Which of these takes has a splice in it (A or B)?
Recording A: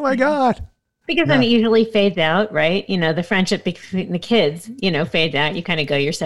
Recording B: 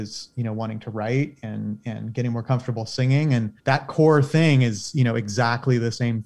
B